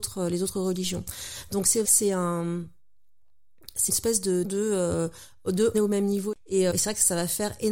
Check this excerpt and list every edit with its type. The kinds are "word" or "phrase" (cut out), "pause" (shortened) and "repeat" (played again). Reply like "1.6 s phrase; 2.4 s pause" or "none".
1.8 s word; 3.9 s word; 4.4 s word; 5.7 s word; 6.7 s word